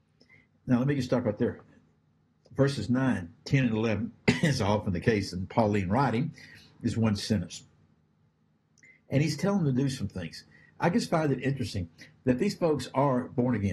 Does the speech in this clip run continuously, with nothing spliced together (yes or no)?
yes